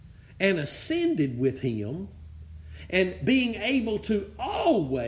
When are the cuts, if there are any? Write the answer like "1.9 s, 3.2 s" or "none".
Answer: none